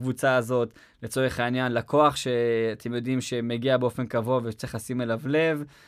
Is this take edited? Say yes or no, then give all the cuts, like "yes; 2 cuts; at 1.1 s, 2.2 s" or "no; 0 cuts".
no; 0 cuts